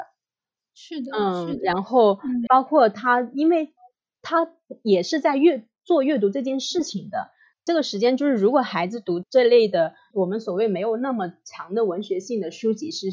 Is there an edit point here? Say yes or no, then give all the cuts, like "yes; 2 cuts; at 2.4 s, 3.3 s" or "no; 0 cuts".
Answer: yes; 1 cut; at 2.5 s